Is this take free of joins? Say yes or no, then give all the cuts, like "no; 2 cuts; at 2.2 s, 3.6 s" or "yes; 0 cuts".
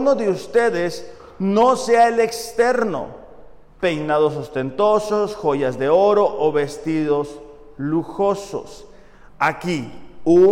yes; 0 cuts